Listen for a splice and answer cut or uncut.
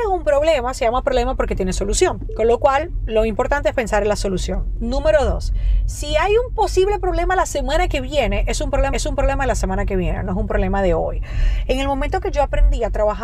cut